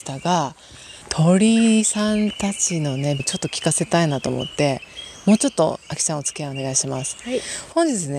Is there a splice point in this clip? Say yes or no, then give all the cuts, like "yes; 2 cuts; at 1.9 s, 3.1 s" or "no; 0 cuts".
yes; 2 cuts; at 1.0 s, 3.2 s